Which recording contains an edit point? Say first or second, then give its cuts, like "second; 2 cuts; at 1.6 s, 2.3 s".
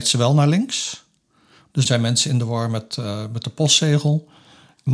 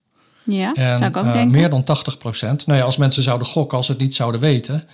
first; 1 cut; at 1.9 s